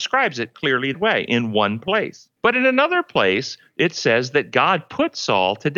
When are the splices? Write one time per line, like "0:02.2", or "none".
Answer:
0:00.9
0:02.4